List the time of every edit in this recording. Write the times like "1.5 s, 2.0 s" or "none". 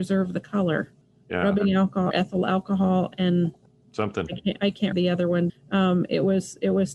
2.1 s, 4.9 s, 5.5 s